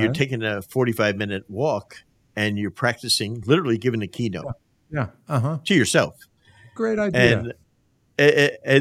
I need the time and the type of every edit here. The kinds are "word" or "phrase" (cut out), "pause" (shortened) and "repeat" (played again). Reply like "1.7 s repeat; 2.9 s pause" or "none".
none